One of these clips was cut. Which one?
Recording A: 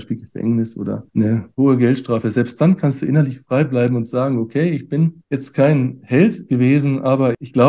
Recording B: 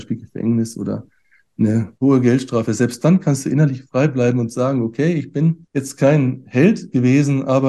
A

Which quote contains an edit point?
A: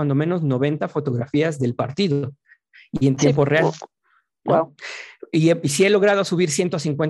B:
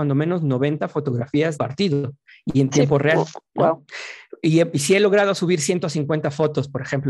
B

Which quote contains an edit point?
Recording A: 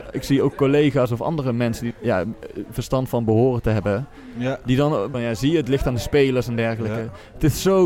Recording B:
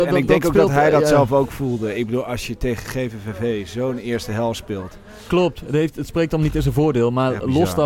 A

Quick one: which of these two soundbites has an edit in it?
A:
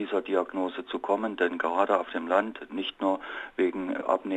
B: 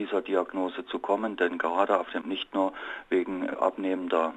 B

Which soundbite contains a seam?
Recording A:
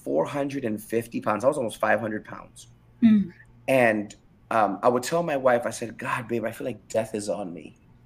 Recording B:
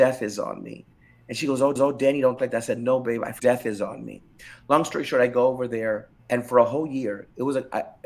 B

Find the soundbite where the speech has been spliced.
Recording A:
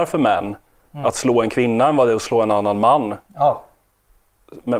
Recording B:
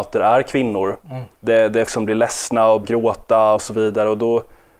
B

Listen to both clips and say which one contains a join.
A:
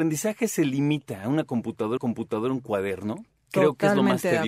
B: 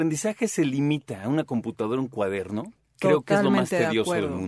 A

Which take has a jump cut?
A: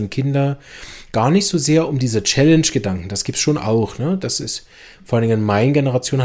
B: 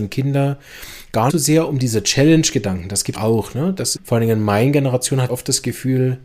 B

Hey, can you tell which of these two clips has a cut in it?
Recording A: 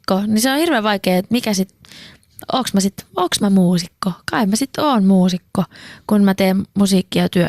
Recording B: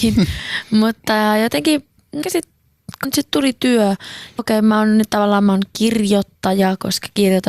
B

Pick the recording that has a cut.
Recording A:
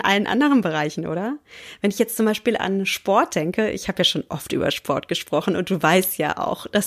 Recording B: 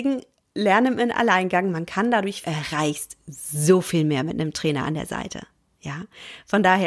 B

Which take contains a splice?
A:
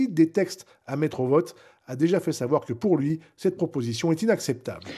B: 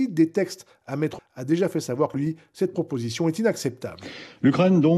B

